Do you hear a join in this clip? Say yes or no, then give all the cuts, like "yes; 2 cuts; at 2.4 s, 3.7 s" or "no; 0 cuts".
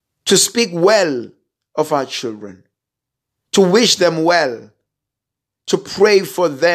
no; 0 cuts